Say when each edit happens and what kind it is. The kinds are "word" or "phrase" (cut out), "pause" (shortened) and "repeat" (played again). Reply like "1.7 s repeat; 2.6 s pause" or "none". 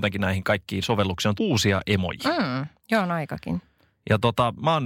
1.4 s word

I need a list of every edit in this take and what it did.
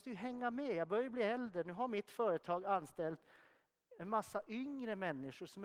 none

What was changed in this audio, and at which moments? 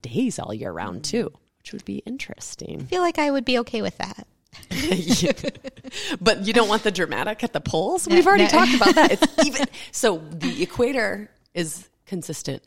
1.5 s pause

